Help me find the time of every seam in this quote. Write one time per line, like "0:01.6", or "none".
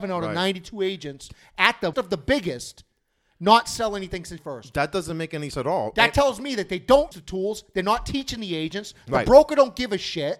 0:01.9
0:04.4
0:05.5
0:07.1